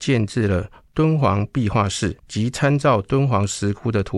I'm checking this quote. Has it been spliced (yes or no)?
yes